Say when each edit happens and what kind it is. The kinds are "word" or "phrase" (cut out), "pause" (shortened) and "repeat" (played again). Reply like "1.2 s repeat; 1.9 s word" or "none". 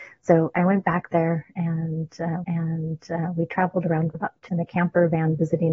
2.4 s repeat; 4.1 s word; 4.5 s word